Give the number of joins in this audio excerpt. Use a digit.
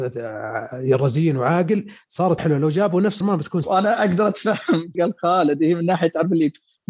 4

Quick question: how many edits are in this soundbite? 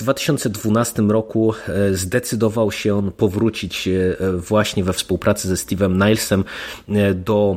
0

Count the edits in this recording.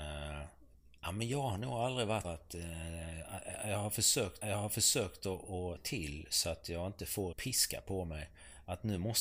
4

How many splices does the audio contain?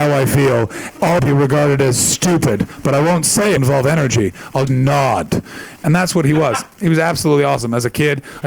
3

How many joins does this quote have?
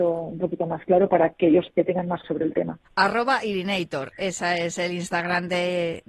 3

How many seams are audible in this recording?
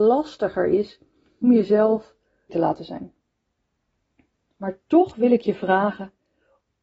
2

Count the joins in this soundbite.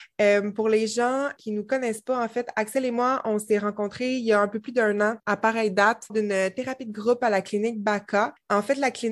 2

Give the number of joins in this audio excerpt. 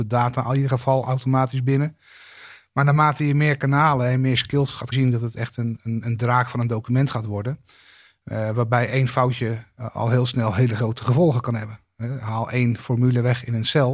1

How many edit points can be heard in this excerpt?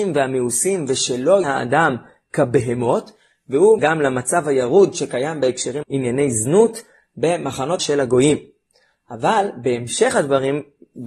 4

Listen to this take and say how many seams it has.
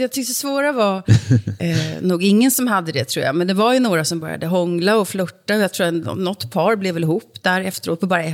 0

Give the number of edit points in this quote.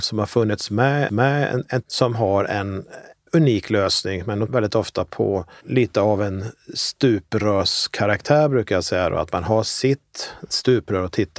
3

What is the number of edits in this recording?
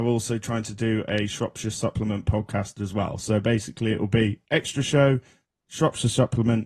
0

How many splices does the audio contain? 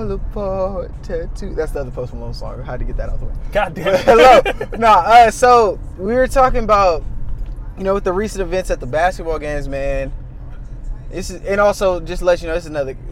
0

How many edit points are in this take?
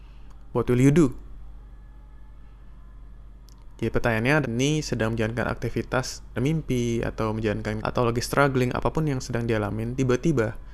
3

